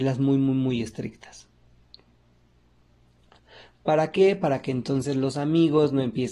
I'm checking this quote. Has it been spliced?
no; 0 cuts

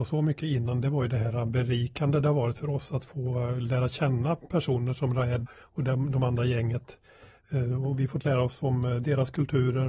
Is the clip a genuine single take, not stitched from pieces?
no; 1 cut; at 5.5 s

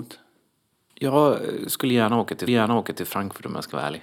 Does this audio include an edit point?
yes; 1 cut; at 2.5 s

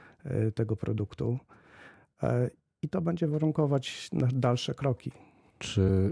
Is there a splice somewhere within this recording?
no; 0 cuts

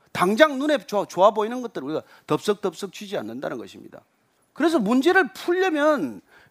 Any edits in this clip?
no; 0 cuts

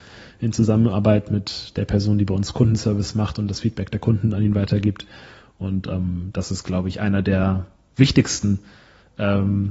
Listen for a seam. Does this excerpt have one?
no; 0 cuts

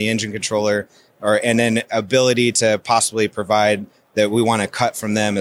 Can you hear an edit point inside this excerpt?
no; 0 cuts

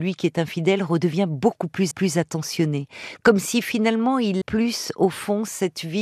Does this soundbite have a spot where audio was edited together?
yes; 2 cuts; at 1.9 s, 4.4 s

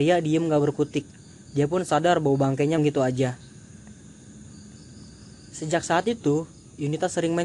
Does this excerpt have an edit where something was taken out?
yes; 1 cut; at 2.8 s

